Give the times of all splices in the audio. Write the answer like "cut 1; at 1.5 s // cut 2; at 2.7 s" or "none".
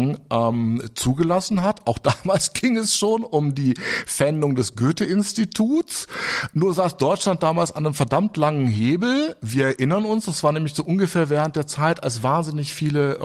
none